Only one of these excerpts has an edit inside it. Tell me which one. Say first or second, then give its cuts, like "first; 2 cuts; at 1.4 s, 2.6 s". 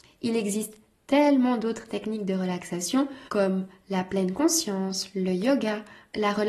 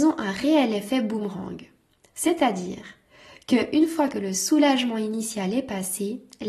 first; 1 cut; at 3.3 s